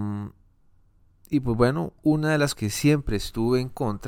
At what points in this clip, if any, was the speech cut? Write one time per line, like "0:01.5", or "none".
0:02.0
0:02.6